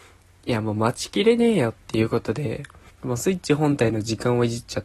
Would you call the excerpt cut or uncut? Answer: cut